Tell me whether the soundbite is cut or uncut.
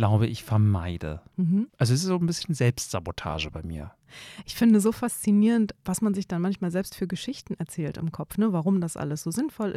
uncut